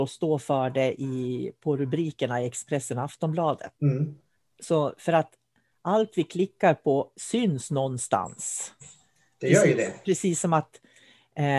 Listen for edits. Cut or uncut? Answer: cut